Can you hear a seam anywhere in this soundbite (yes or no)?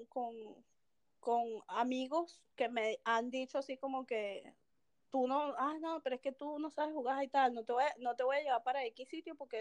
no